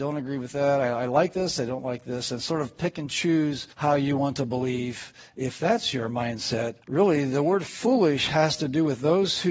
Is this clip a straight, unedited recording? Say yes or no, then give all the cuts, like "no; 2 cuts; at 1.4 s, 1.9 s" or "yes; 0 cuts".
no; 2 cuts; at 3.7 s, 6.8 s